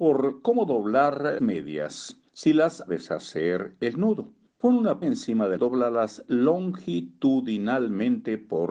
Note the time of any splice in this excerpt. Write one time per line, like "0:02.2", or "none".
0:01.4
0:02.3
0:02.9
0:04.5
0:05.0
0:05.6